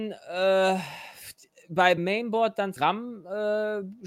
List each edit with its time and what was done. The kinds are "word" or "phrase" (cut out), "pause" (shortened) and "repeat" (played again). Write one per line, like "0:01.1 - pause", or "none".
0:02.0 - word
0:02.8 - word